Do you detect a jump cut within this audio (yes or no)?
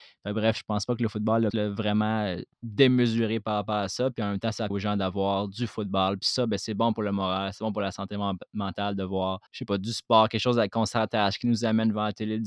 yes